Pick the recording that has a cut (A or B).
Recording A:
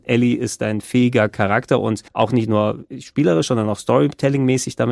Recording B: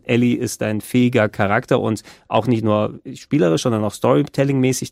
A